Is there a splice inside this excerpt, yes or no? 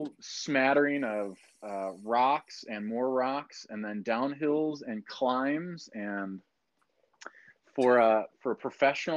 no